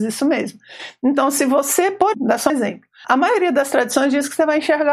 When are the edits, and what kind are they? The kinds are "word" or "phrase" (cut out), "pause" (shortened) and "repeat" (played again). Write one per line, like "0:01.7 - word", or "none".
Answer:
0:02.1 - word
0:02.5 - word
0:03.0 - word